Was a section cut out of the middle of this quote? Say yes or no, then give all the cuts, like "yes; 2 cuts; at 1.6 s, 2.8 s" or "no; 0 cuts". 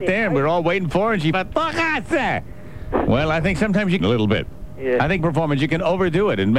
yes; 3 cuts; at 1.3 s, 4.0 s, 5.2 s